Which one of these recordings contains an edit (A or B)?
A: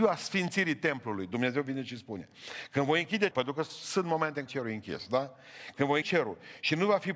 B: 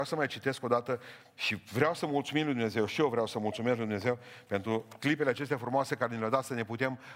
A